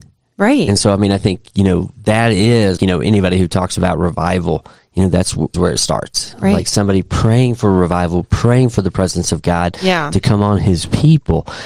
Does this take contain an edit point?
yes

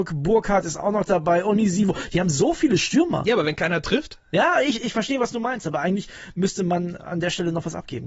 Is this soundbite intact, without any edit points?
yes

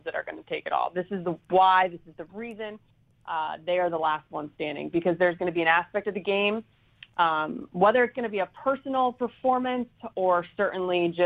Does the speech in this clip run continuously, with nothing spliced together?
yes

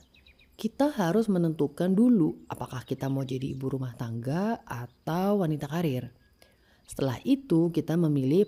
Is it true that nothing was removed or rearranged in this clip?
yes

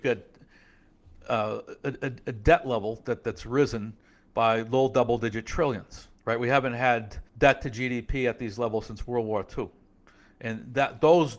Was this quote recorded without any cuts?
no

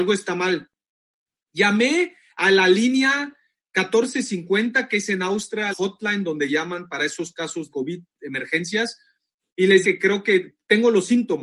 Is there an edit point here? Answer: yes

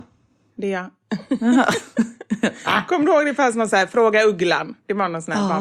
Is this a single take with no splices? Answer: yes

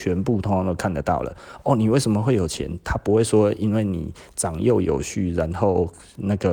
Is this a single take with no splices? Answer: yes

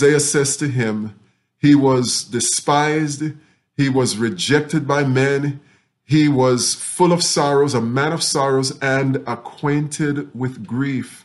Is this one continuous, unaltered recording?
yes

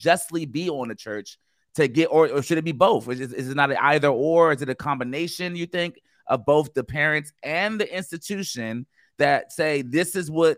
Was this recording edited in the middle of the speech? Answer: no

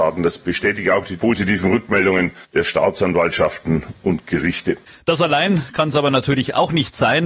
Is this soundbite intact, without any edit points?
no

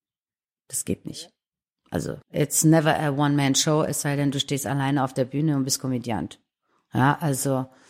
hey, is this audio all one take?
no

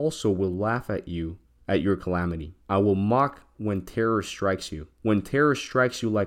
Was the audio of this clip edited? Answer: yes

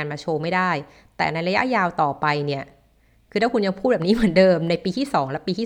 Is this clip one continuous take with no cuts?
yes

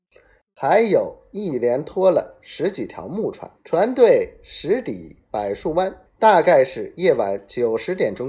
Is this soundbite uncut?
no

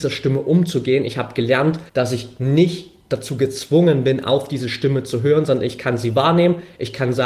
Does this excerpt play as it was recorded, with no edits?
no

